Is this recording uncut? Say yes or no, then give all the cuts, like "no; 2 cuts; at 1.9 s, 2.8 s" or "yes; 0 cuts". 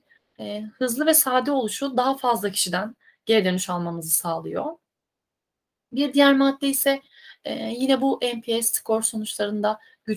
yes; 0 cuts